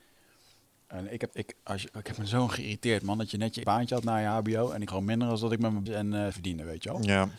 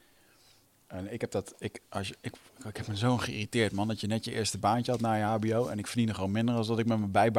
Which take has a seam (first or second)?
first